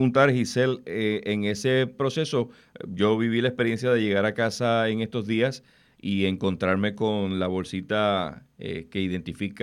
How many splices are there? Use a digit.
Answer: 0